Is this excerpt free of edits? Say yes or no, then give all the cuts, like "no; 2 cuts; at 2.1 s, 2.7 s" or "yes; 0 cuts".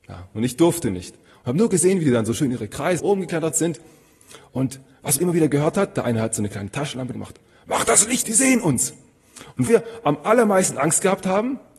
no; 5 cuts; at 3.0 s, 5.2 s, 7.1 s, 8.2 s, 9.7 s